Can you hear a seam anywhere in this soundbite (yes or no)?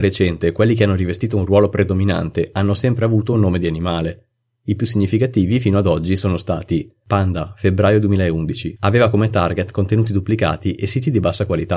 no